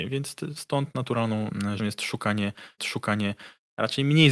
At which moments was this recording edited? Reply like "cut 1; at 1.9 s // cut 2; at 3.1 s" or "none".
cut 1; at 1.8 s // cut 2; at 2.8 s